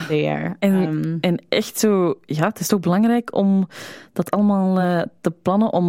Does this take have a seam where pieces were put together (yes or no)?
no